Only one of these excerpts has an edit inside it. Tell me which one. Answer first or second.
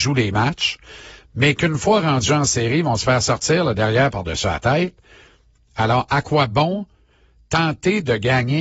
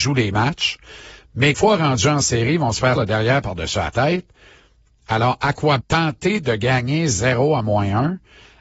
second